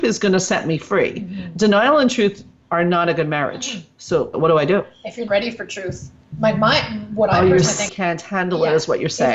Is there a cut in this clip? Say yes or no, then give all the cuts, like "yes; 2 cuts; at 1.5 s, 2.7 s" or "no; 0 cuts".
yes; 3 cuts; at 4.3 s, 5.3 s, 7.9 s